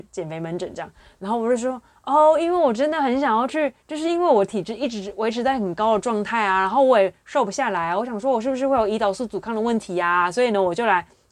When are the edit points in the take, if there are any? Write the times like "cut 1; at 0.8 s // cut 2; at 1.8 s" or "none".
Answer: cut 1; at 3.8 s